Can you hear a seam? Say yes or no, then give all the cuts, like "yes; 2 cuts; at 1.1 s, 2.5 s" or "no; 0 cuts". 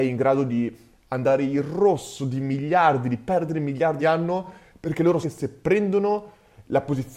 yes; 2 cuts; at 4.0 s, 5.2 s